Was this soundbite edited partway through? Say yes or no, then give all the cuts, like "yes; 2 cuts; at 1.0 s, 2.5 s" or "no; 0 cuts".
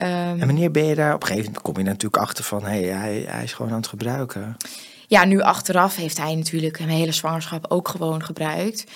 no; 0 cuts